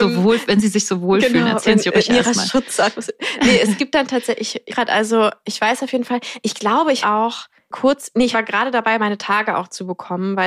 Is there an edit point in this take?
yes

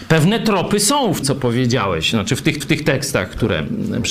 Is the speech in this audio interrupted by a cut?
yes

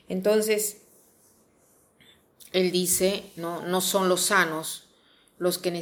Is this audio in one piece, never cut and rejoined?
yes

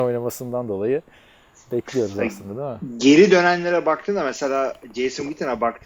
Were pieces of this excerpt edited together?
no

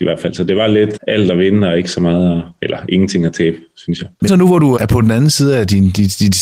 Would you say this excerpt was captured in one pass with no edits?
no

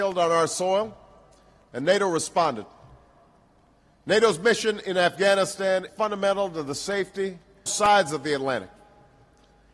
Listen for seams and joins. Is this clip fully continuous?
no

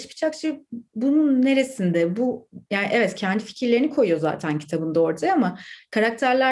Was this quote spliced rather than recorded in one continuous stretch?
yes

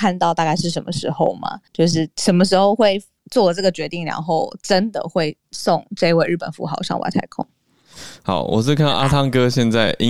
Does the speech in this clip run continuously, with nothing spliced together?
no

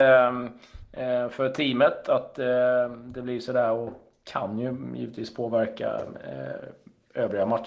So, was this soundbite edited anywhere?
no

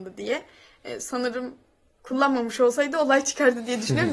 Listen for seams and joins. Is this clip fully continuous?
yes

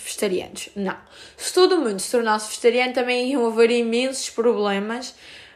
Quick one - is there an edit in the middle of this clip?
no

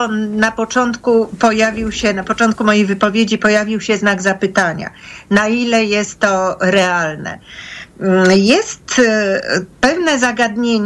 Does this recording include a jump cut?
yes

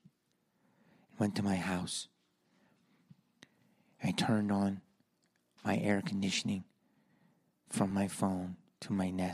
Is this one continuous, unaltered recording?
yes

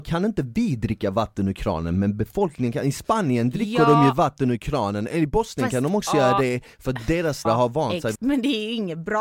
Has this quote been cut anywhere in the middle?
yes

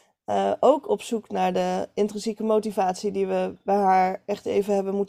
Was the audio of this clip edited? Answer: no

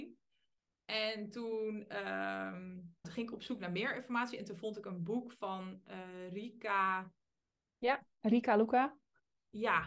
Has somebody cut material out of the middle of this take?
yes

